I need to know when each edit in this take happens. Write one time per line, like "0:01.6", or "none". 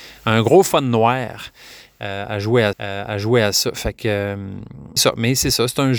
0:02.7
0:05.0